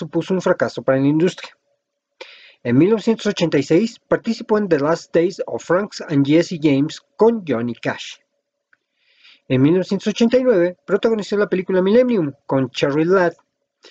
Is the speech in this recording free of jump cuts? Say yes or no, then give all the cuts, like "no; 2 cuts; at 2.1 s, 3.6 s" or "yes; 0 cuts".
yes; 0 cuts